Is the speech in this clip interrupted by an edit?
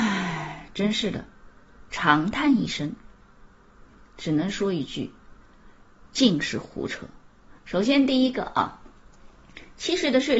yes; 2 cuts; at 1.9 s, 7.6 s

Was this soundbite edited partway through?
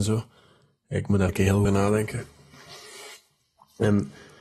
yes; 2 cuts; at 1.3 s, 1.6 s

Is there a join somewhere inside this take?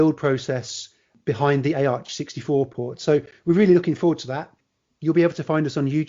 no; 0 cuts

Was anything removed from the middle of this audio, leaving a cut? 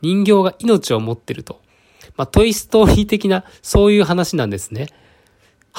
no; 0 cuts

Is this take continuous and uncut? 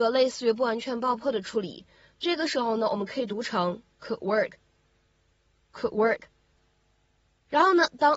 yes; 0 cuts

